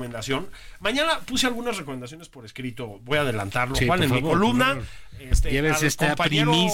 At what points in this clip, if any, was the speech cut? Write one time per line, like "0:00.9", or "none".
none